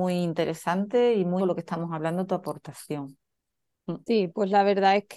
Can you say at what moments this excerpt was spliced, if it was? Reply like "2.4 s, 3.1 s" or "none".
1.4 s, 4.0 s